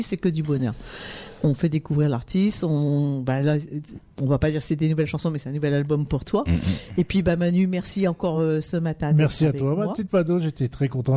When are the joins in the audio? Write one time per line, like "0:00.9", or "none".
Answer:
none